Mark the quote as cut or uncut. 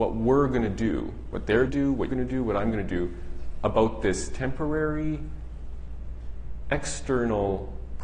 cut